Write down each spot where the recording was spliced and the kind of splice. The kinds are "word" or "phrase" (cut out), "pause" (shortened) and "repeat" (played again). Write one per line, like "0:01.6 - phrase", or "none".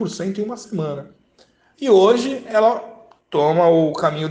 none